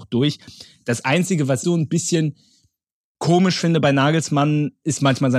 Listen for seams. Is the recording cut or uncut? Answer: cut